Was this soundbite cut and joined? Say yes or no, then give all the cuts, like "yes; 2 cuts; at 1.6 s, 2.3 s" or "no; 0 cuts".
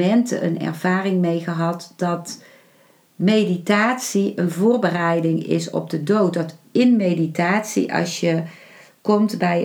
no; 0 cuts